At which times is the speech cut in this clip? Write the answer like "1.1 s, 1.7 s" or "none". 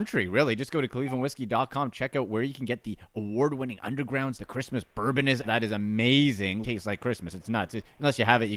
4.3 s, 5.4 s, 6.6 s